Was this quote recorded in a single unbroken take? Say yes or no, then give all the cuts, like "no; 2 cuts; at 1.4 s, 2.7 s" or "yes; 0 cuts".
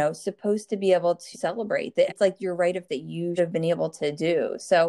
no; 4 cuts; at 1.3 s, 2.1 s, 2.9 s, 3.4 s